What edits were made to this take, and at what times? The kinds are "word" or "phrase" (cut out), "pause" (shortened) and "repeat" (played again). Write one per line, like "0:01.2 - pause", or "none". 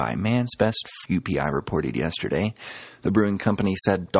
0:01.0 - word